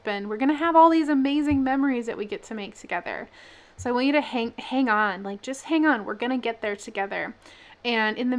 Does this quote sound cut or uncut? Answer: uncut